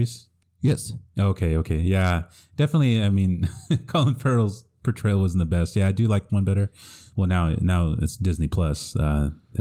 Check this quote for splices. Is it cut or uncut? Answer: cut